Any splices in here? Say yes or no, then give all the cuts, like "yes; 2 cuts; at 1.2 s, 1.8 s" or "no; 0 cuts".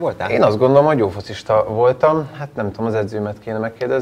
no; 0 cuts